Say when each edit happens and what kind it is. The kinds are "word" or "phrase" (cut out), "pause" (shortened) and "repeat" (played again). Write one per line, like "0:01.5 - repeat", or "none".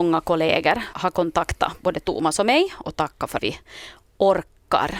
0:00.9 - word
0:02.8 - word
0:03.4 - word

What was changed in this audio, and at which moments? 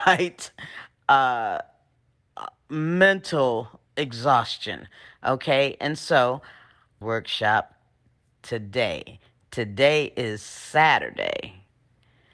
0:03.9 - pause
0:07.0 - phrase

